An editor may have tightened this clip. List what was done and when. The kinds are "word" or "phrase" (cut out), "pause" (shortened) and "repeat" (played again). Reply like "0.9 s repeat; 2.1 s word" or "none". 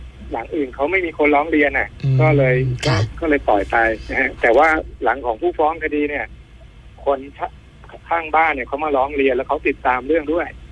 6.9 s pause